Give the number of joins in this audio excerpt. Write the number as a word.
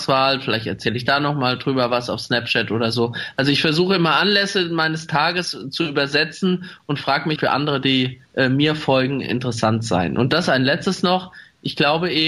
two